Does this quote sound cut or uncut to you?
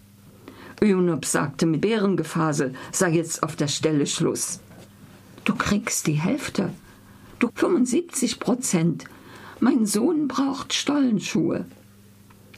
cut